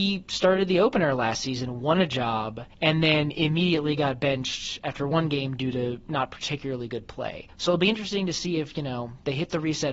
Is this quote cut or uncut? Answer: cut